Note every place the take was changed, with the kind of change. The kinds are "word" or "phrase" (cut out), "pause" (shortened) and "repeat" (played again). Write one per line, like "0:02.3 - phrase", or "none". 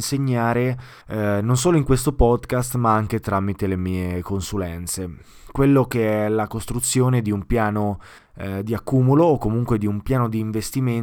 0:01.0 - pause
0:08.2 - pause